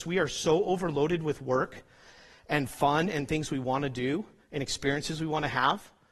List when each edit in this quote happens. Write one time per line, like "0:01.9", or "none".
none